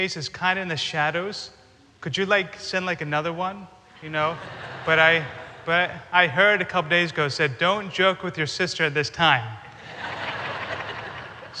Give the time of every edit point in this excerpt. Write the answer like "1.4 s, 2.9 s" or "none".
none